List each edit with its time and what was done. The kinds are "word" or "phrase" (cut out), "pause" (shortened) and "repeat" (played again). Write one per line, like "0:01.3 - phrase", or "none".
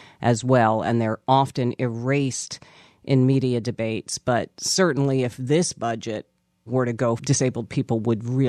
0:07.2 - word